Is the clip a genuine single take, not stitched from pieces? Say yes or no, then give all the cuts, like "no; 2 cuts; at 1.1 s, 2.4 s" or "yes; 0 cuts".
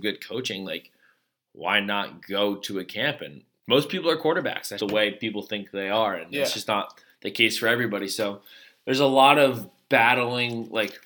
no; 2 cuts; at 3.6 s, 4.8 s